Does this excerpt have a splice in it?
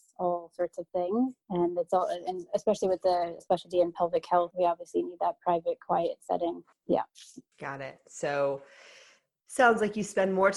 no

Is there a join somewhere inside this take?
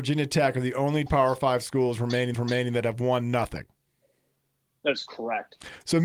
yes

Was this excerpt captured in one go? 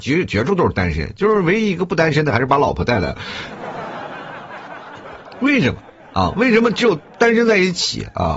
yes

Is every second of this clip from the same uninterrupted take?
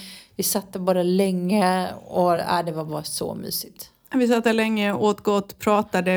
yes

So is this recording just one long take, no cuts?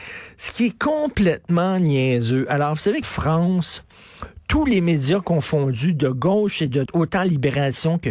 no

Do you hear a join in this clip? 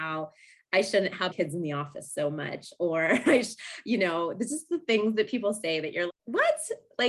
yes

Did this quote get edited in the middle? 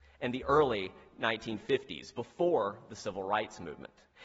no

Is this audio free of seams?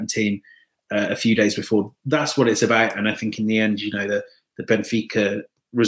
yes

